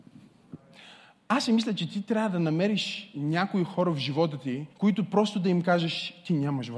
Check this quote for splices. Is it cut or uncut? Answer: cut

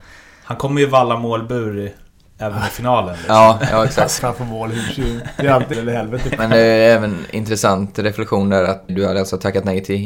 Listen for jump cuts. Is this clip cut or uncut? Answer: cut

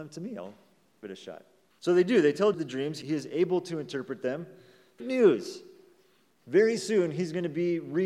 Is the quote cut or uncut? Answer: cut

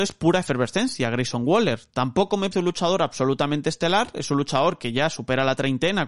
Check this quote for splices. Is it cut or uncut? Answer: cut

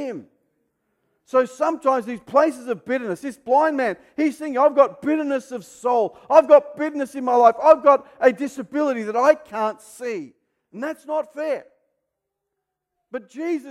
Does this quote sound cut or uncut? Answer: uncut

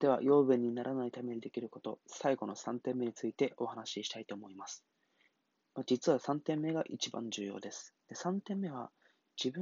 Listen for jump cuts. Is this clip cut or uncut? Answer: cut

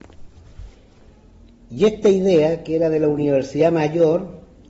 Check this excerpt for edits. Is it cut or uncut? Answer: uncut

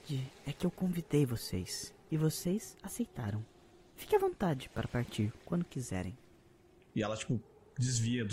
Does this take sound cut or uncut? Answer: uncut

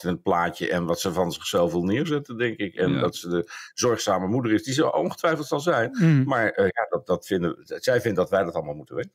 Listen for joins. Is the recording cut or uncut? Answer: uncut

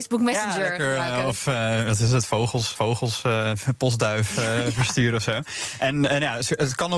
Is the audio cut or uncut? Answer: cut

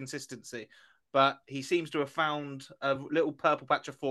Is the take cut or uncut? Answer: uncut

